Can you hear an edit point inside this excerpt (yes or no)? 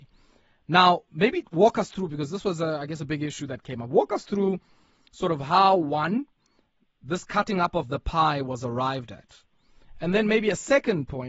no